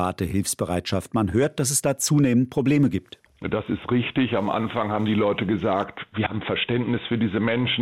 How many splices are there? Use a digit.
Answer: 0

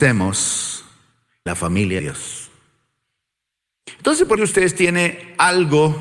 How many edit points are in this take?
3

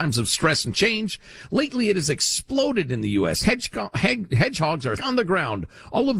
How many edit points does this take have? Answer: 1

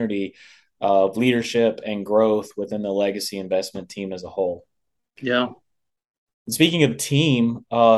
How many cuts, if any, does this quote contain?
0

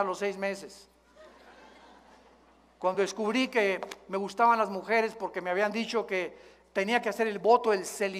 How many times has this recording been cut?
0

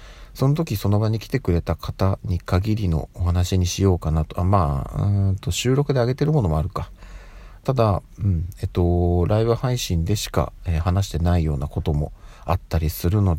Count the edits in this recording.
0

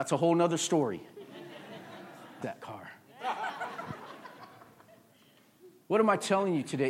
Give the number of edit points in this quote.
1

